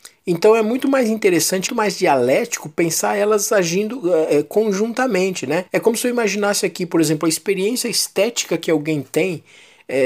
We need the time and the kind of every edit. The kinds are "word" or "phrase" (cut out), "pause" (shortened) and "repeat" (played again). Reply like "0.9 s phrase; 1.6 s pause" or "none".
1.7 s word; 5.7 s pause